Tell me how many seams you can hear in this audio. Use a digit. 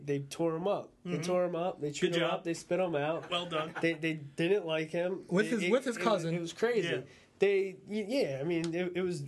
0